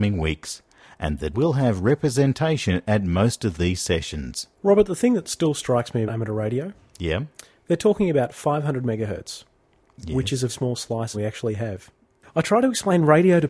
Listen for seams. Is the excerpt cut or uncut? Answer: cut